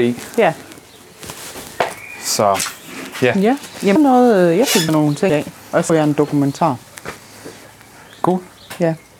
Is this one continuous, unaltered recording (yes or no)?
no